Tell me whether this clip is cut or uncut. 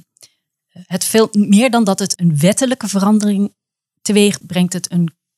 cut